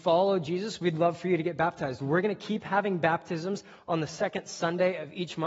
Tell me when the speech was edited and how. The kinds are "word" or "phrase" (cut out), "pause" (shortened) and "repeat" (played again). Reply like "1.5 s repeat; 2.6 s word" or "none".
none